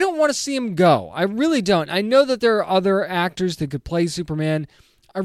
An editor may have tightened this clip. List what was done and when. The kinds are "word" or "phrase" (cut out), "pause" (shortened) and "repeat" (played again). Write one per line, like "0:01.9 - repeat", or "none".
none